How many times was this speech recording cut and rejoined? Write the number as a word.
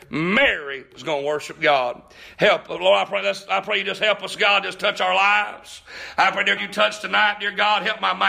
one